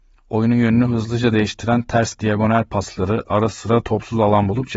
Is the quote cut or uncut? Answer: uncut